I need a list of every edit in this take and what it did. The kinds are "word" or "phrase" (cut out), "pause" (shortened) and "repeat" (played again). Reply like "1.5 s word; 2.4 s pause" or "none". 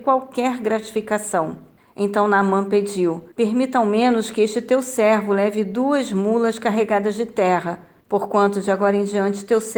1.8 s pause; 3.3 s pause; 8.0 s pause